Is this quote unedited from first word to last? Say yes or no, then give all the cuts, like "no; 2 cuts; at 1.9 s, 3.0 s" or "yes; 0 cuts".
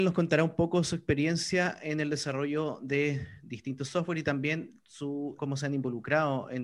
no; 1 cut; at 5.4 s